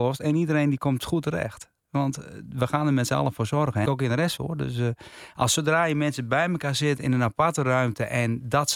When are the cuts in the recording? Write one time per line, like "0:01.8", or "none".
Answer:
0:03.9
0:04.4